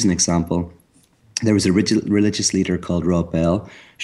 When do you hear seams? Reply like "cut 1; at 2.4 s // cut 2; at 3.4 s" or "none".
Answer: none